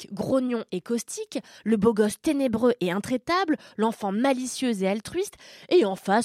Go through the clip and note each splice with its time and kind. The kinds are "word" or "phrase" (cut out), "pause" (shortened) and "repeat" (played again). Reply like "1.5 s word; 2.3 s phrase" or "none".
none